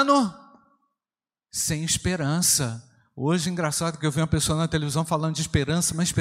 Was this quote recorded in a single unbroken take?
yes; 0 cuts

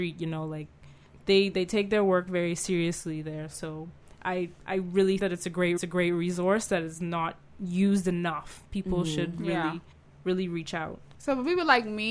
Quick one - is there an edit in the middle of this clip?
yes; 3 cuts; at 5.2 s, 5.8 s, 9.9 s

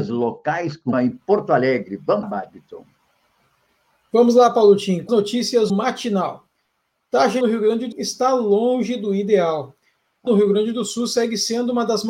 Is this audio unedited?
no; 7 cuts; at 0.9 s, 2.2 s, 5.1 s, 5.7 s, 7.4 s, 7.9 s, 10.3 s

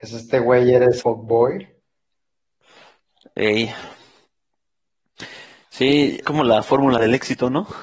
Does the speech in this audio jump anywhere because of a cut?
yes; 2 cuts; at 1.0 s, 6.2 s

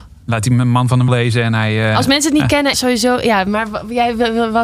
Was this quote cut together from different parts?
yes; 2 cuts; at 1.1 s, 2.7 s

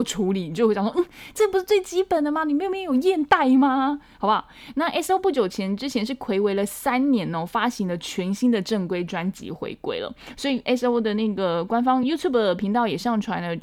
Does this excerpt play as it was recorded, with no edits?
yes; 0 cuts

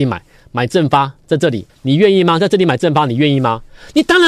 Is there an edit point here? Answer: yes; 1 cut; at 1.7 s

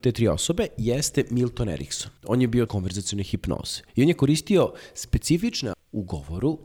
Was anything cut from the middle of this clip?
yes; 3 cuts; at 2.2 s, 2.7 s, 5.7 s

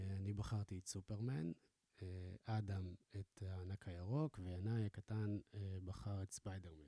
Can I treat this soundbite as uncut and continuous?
yes; 0 cuts

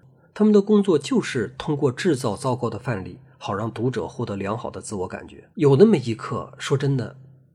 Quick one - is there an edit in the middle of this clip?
yes; 1 cut; at 5.5 s

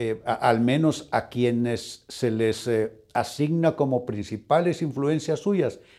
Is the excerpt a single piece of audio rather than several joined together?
yes; 0 cuts

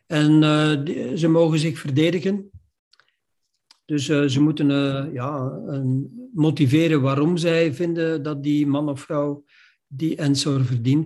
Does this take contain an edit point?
no; 0 cuts

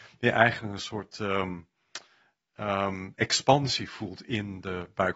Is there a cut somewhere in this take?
no; 0 cuts

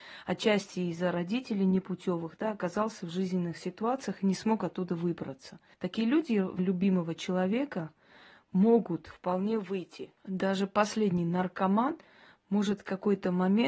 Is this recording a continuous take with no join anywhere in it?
no; 3 cuts; at 5.7 s, 6.6 s, 10.2 s

